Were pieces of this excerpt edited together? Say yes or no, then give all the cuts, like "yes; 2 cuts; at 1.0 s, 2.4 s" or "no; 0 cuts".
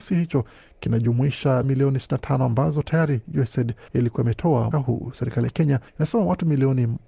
yes; 4 cuts; at 1.6 s, 3.9 s, 4.7 s, 5.9 s